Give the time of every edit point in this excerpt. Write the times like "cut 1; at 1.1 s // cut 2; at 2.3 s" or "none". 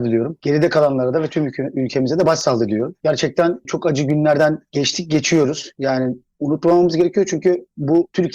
none